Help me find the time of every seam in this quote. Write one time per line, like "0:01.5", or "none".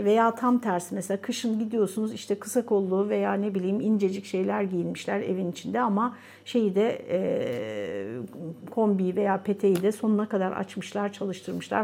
none